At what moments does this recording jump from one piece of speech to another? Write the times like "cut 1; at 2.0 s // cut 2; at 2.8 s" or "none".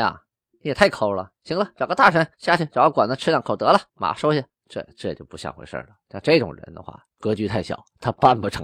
cut 1; at 2.3 s // cut 2; at 3.9 s // cut 3; at 4.5 s